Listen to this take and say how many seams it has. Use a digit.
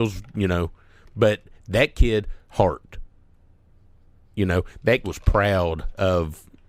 1